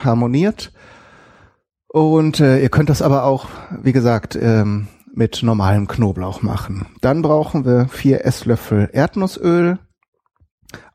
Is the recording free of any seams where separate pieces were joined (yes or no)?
yes